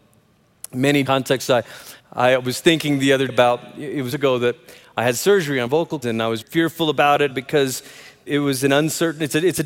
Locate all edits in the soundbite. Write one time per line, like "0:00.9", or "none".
0:01.0
0:02.0
0:03.3
0:04.1
0:05.7
0:06.0
0:06.4
0:07.3
0:08.3